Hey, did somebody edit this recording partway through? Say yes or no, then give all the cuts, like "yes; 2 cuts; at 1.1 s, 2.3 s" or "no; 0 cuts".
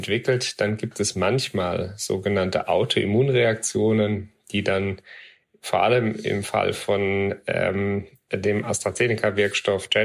no; 0 cuts